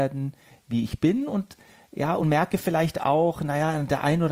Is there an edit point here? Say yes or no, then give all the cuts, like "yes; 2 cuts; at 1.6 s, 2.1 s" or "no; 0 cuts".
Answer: no; 0 cuts